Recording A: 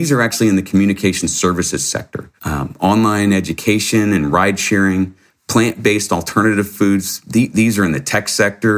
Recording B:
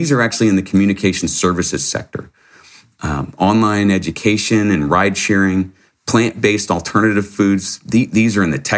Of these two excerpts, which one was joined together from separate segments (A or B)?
A